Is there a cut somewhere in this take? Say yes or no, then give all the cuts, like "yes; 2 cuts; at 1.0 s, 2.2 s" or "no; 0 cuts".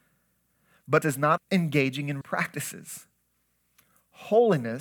yes; 3 cuts; at 1.0 s, 1.4 s, 2.2 s